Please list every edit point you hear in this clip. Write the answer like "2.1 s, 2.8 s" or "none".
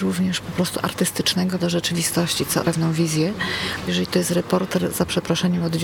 1.6 s, 2.6 s, 3.9 s